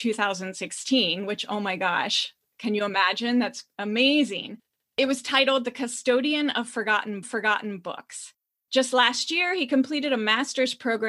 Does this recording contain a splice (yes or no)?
yes